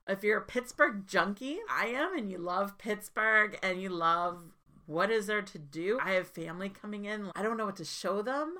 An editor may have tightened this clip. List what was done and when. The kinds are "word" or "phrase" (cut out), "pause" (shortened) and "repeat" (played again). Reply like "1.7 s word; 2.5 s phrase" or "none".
1.6 s word; 6.0 s word; 7.3 s word